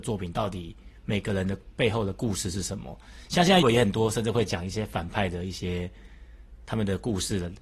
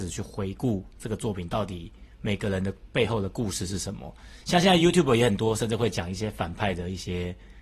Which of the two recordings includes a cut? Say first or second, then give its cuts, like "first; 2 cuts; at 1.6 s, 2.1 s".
first; 1 cut; at 3.6 s